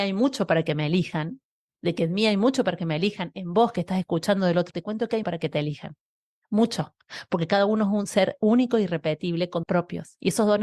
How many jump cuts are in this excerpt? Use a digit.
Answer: 3